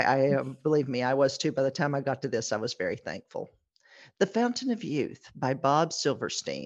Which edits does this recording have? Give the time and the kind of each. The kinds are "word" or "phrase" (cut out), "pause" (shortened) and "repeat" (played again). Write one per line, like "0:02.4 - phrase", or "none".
none

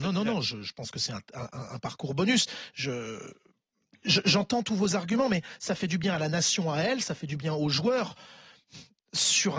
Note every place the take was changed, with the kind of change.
none

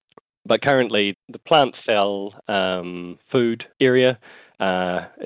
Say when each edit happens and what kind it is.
0:01.1 - word
0:03.7 - pause

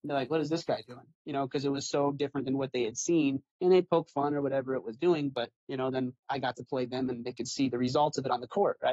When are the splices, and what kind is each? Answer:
0:01.1 - pause
0:03.5 - pause
0:05.6 - pause

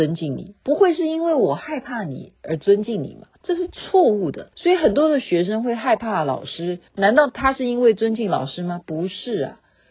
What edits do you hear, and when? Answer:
0:03.4 - pause
0:04.5 - pause
0:06.9 - pause

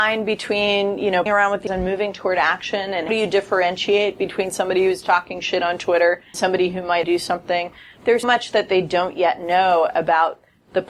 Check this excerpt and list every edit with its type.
0:01.3 - word
0:01.7 - word
0:03.1 - word
0:05.0 - word
0:06.3 - word
0:07.0 - word
0:08.2 - word

